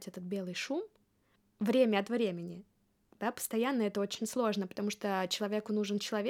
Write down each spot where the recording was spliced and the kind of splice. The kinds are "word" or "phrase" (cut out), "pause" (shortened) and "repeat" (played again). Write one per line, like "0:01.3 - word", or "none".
none